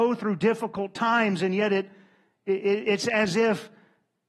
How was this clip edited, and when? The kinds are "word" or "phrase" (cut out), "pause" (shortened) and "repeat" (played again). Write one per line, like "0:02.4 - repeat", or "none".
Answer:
none